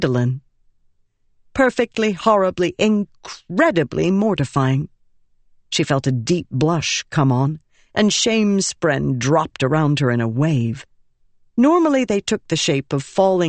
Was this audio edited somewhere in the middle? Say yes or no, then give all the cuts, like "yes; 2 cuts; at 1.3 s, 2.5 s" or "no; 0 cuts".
no; 0 cuts